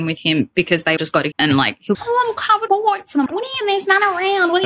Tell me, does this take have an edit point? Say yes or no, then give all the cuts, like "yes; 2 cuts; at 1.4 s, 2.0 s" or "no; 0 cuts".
yes; 6 cuts; at 1.0 s, 1.3 s, 1.9 s, 2.7 s, 3.3 s, 3.6 s